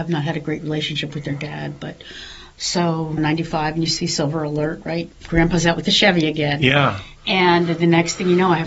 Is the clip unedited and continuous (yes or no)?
no